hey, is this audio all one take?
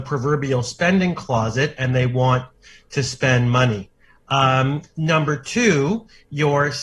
yes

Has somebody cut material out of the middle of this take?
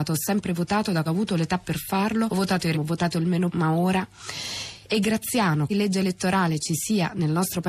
yes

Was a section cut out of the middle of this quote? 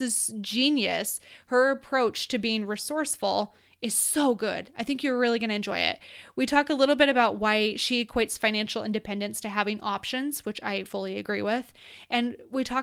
yes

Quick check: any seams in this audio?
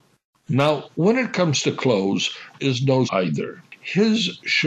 yes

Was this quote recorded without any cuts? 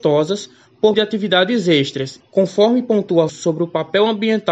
no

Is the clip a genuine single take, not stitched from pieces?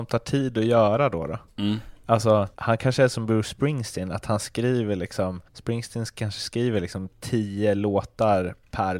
no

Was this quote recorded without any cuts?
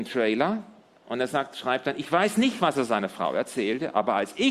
yes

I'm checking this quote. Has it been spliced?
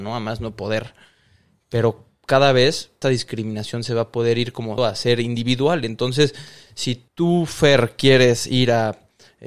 yes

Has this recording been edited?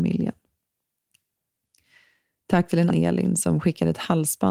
yes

